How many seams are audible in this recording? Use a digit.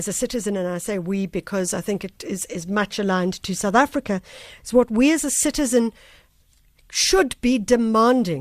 0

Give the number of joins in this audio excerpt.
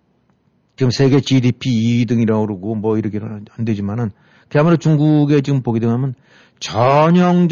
0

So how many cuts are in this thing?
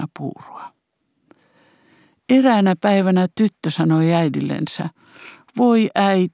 0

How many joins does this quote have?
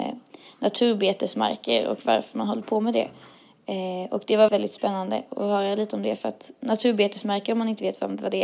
1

